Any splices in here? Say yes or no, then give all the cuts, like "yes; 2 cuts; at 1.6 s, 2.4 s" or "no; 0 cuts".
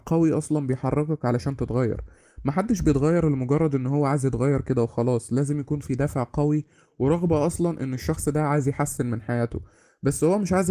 no; 0 cuts